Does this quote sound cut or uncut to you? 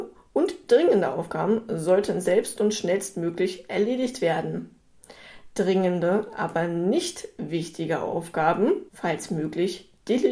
cut